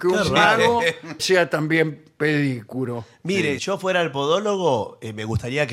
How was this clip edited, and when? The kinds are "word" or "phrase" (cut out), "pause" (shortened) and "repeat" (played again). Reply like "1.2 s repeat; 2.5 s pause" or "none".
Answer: 1.2 s word; 3.6 s word

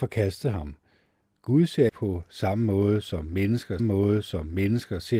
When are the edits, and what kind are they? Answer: 1.9 s word; 3.8 s repeat

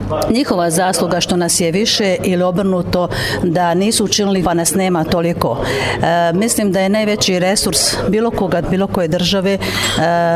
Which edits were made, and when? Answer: 4.4 s word; 8.6 s word

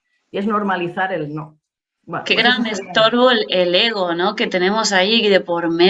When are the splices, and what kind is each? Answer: none

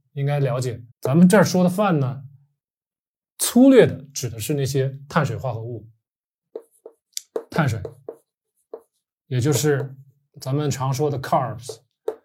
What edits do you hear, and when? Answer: 0.9 s pause

